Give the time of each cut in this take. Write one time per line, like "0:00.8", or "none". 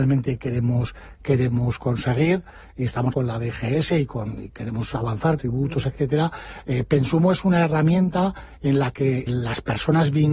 0:03.1
0:05.4
0:09.3